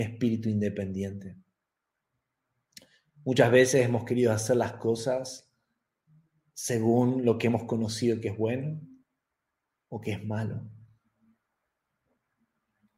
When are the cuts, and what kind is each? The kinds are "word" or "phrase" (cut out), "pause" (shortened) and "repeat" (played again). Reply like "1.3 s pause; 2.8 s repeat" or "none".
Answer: 6.1 s pause